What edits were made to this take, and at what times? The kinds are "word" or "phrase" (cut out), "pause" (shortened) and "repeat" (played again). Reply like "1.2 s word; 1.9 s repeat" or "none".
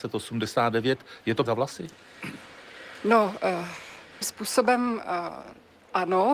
1.5 s word; 4.2 s word